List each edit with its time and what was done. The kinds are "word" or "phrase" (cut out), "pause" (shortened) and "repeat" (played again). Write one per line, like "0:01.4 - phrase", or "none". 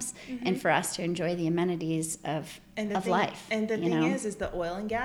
none

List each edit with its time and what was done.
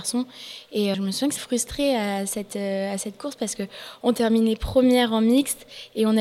0:00.9 - word
0:01.4 - word

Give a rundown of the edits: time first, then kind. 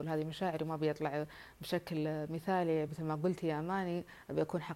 none

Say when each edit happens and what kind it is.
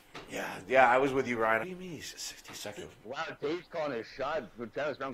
0:01.6 - phrase
0:03.0 - word

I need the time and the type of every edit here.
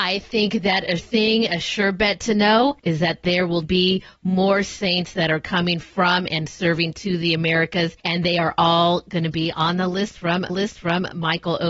0:01.0 - word
0:02.8 - pause
0:03.6 - word
0:08.0 - pause
0:10.5 - repeat

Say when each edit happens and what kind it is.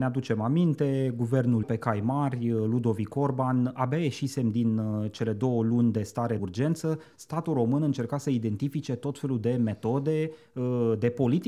0:01.6 - word
0:06.4 - word

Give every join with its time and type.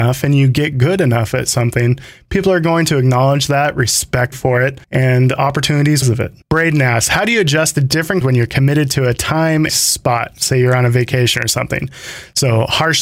0:04.3 - word
0:04.8 - pause
0:06.0 - phrase
0:06.4 - pause
0:08.2 - word
0:09.7 - phrase

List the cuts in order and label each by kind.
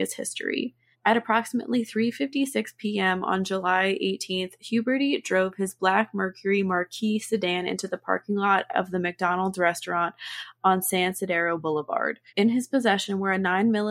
0:00.9 - pause
0:12.3 - pause

